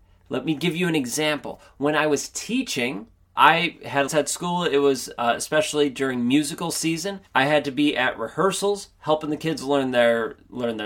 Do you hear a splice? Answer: yes; 3 cuts; at 3.4 s, 4.1 s, 7.3 s

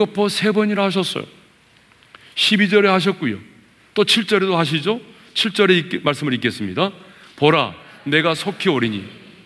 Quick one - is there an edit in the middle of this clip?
no; 0 cuts

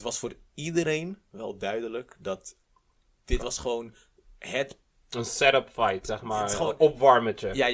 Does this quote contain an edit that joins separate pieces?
no; 0 cuts

